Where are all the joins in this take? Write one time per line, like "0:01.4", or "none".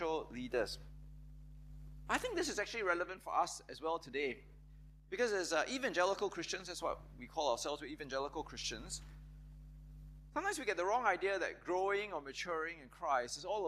none